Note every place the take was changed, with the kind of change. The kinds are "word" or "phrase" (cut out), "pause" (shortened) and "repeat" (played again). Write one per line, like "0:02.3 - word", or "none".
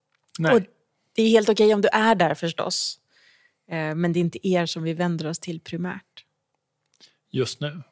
none